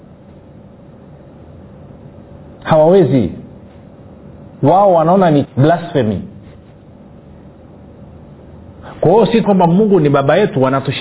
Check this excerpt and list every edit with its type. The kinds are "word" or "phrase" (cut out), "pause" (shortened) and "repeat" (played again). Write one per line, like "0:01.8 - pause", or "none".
0:05.4 - word
0:09.4 - word